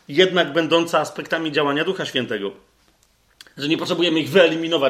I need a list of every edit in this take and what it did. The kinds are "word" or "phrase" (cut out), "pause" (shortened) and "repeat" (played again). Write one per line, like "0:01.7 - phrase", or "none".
none

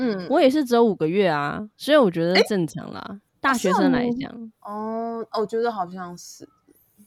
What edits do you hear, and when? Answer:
0:01.7 - pause
0:03.3 - pause
0:04.5 - pause

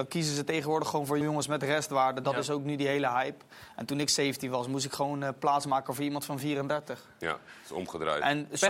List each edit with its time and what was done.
0:01.2 - word

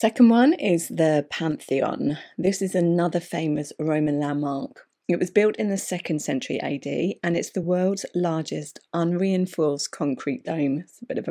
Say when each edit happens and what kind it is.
none

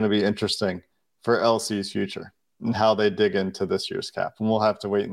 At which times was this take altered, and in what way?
none

